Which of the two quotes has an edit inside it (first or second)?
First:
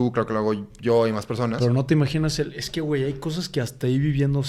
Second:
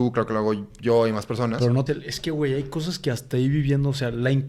second